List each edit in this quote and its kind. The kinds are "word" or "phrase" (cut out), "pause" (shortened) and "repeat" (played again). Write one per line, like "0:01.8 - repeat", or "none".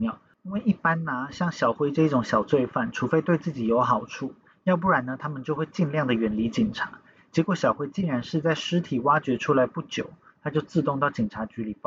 none